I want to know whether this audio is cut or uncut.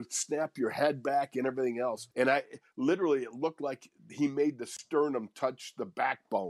cut